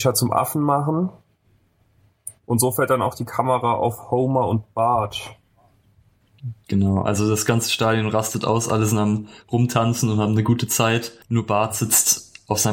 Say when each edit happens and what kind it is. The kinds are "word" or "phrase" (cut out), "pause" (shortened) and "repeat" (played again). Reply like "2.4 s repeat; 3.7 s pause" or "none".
2.4 s pause; 11.2 s pause